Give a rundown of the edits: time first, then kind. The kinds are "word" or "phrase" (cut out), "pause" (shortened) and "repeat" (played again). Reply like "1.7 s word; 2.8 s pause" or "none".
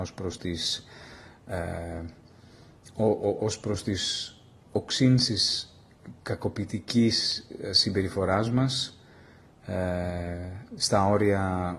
none